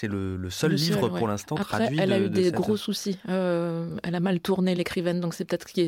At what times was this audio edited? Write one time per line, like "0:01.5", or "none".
none